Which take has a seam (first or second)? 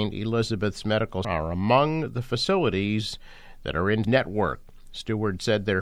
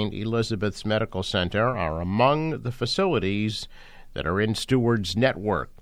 first